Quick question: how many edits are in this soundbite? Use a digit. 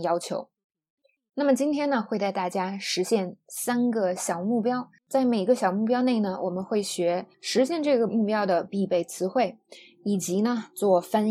2